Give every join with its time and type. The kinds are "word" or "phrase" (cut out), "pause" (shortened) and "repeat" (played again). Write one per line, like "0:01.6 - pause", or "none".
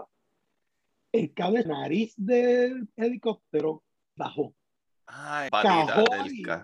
0:01.7 - phrase
0:04.2 - word
0:05.5 - phrase